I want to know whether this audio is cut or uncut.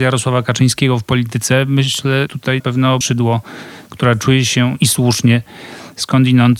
cut